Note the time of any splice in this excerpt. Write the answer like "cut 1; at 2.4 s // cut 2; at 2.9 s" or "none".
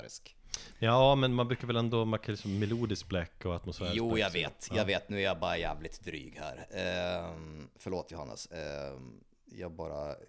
none